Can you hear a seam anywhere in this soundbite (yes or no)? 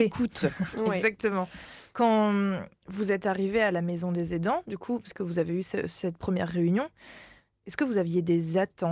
no